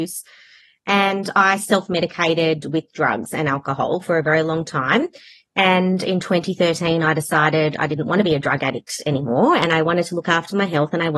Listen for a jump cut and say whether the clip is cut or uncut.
uncut